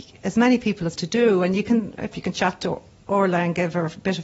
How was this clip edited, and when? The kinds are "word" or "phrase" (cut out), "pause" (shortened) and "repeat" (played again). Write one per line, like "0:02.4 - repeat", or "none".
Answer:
0:01.0 - word
0:02.1 - phrase